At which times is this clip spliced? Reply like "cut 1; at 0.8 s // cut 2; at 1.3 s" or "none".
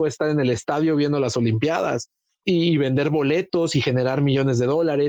cut 1; at 2.4 s